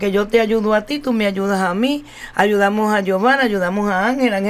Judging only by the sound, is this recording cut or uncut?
uncut